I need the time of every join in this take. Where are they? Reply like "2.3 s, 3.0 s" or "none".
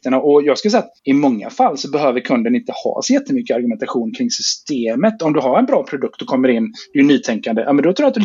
1.0 s